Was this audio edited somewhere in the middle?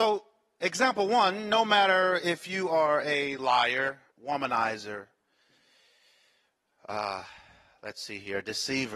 yes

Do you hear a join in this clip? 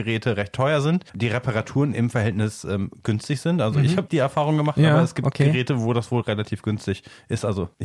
yes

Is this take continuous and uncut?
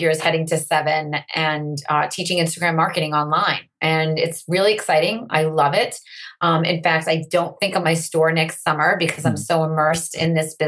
no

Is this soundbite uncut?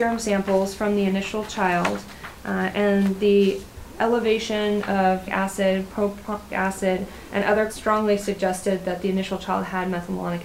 no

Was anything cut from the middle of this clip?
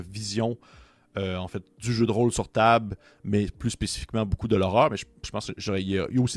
no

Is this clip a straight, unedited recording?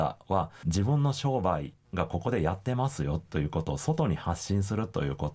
yes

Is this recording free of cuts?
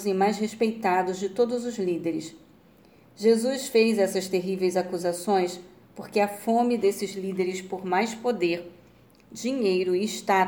yes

